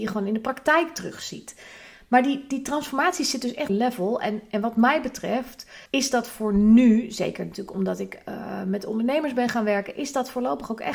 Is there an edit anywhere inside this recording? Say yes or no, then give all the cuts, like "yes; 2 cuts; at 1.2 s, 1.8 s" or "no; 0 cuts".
yes; 2 cuts; at 3.7 s, 5.9 s